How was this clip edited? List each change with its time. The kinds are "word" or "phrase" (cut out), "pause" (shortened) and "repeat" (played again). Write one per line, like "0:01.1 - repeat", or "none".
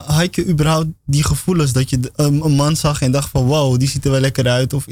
none